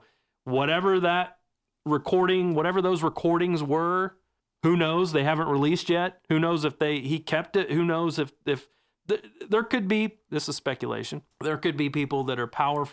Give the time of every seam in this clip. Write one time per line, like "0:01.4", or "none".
0:11.3